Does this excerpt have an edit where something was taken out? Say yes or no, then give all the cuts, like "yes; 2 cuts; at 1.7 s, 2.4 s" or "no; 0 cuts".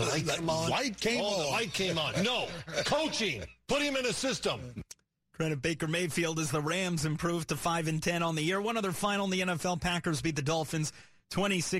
no; 0 cuts